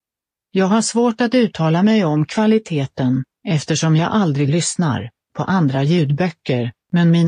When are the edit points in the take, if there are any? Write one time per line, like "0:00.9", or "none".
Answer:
none